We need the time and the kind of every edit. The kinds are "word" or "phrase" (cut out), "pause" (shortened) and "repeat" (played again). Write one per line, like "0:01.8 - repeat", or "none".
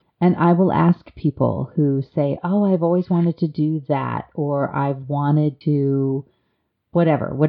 0:05.6 - pause